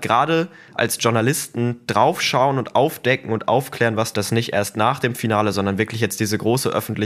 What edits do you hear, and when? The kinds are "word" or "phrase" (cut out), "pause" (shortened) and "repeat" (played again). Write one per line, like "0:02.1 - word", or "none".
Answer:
0:04.1 - phrase